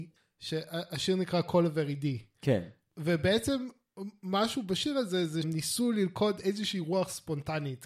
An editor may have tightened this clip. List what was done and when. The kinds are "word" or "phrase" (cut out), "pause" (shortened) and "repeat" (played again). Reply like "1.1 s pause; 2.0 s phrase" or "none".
5.4 s word